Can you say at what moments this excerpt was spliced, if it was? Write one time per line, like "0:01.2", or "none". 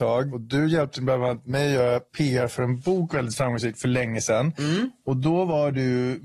none